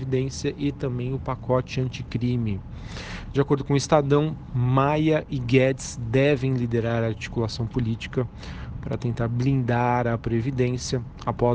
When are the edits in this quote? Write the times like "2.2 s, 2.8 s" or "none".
none